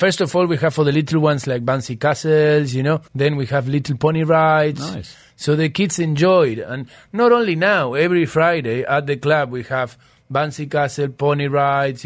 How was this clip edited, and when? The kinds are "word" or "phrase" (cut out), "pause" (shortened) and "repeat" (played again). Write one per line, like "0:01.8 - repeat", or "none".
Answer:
0:03.1 - pause